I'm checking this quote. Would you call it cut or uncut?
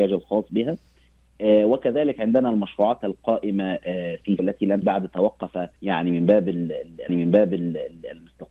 cut